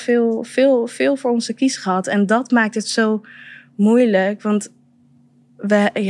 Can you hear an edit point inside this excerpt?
no; 0 cuts

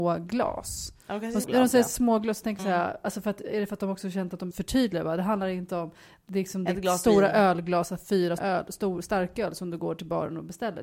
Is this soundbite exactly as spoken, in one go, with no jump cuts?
no; 4 cuts; at 1.4 s, 2.6 s, 4.5 s, 8.4 s

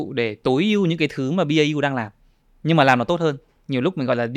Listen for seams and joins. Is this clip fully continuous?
yes; 0 cuts

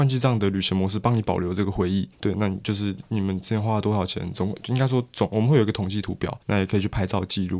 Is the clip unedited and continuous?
no; 2 cuts; at 2.1 s, 6.4 s

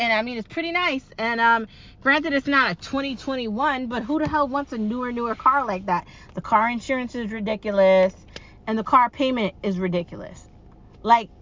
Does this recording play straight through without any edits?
yes; 0 cuts

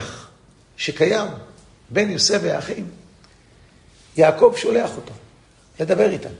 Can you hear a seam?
no; 0 cuts

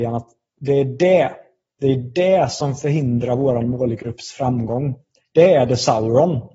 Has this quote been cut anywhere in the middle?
no; 0 cuts

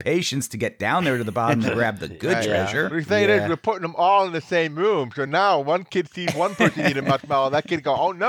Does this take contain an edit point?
no; 0 cuts

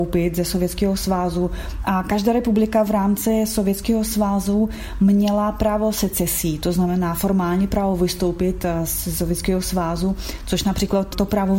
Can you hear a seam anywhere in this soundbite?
no; 0 cuts

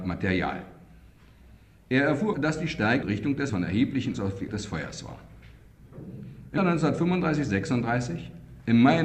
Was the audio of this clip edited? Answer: yes; 6 cuts; at 2.3 s, 3.0 s, 3.5 s, 4.1 s, 4.5 s, 6.6 s

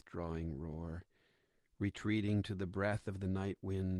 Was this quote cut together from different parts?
no; 0 cuts

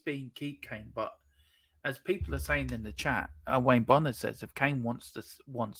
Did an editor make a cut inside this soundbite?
no; 0 cuts

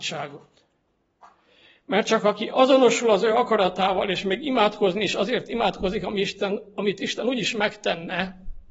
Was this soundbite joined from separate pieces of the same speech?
no; 0 cuts

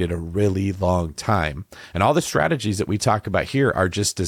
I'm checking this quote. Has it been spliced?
no; 0 cuts

